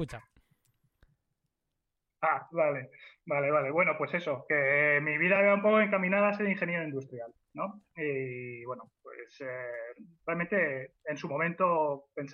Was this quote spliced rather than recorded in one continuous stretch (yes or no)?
no